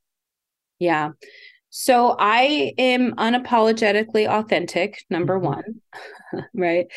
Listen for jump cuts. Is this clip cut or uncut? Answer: uncut